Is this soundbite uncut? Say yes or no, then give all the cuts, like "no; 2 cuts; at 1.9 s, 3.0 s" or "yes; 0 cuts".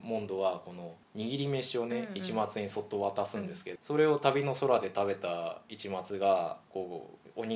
no; 1 cut; at 3.8 s